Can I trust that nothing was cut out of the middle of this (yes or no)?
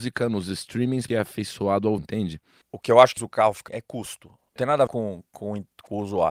no